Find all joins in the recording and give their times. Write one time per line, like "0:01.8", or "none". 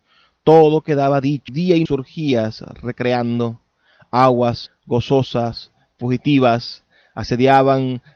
0:01.5
0:01.9
0:04.7